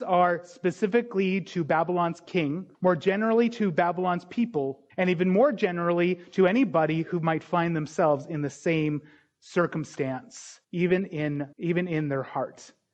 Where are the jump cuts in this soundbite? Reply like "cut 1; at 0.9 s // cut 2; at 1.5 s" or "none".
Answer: cut 1; at 2.7 s // cut 2; at 4.9 s // cut 3; at 10.6 s // cut 4; at 11.5 s